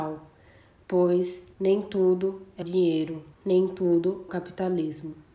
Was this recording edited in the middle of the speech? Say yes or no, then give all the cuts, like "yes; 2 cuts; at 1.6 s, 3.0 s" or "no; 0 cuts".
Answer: yes; 4 cuts; at 1.5 s, 2.6 s, 3.3 s, 4.3 s